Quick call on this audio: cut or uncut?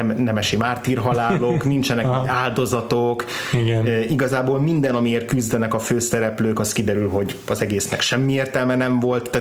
uncut